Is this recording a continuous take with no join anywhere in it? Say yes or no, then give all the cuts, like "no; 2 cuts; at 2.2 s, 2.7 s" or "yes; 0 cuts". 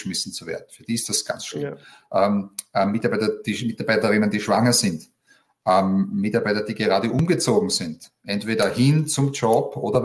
yes; 0 cuts